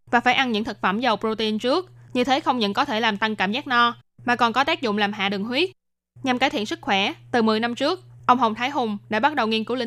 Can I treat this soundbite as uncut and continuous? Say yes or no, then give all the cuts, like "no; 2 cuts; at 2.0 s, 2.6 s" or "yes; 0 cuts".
yes; 0 cuts